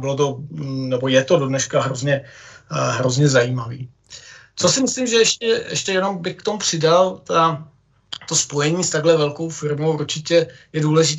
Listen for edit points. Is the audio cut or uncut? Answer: uncut